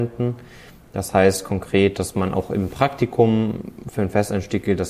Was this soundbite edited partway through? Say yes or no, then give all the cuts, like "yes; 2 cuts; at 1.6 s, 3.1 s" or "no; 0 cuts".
no; 0 cuts